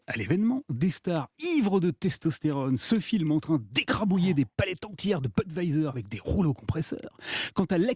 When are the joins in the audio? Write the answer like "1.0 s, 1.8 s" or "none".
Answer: none